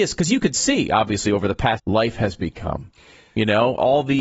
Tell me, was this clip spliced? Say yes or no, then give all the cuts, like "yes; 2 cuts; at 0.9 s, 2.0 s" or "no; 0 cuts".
yes; 1 cut; at 1.8 s